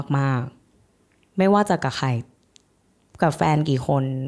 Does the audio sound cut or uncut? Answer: uncut